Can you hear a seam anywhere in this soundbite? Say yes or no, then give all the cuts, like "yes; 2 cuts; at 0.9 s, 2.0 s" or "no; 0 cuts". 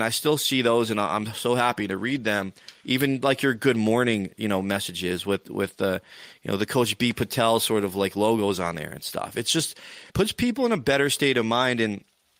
yes; 1 cut; at 10.1 s